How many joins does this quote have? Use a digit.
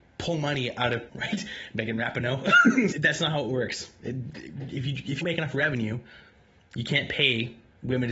3